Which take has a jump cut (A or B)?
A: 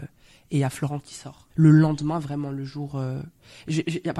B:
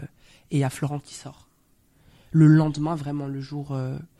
A